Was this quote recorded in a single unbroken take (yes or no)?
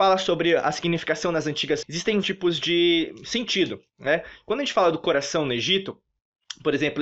no